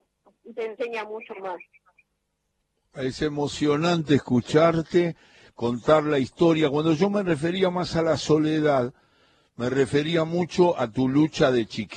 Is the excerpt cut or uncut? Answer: uncut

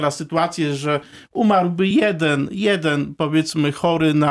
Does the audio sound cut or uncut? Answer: uncut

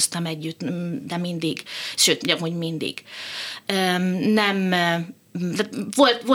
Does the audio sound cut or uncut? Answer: cut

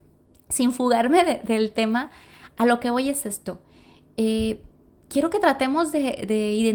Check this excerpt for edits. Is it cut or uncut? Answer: uncut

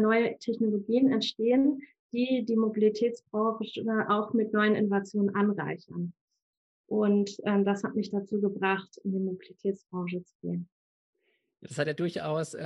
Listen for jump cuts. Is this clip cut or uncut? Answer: uncut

